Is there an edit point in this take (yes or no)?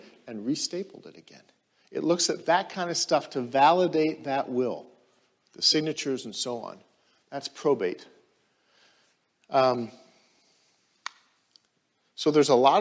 no